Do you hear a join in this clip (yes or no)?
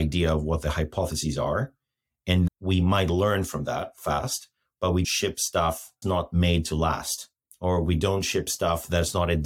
yes